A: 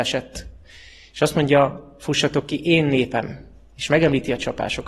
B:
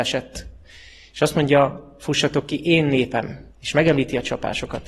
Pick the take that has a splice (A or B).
B